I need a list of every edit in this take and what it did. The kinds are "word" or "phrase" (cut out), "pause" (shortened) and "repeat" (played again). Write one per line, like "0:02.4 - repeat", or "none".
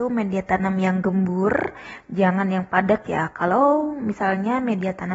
none